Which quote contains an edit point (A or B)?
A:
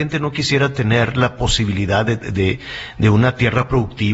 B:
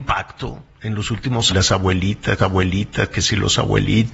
B